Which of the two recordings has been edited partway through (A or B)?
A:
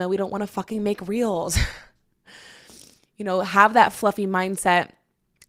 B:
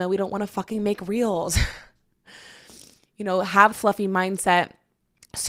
B